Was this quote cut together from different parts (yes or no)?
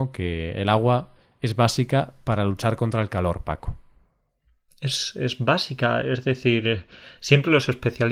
no